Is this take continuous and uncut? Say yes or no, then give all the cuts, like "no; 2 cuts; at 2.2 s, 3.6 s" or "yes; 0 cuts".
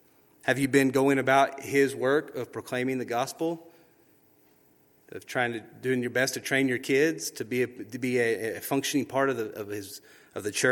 yes; 0 cuts